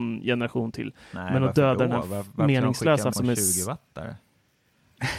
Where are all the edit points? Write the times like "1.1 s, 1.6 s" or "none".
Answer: 3.1 s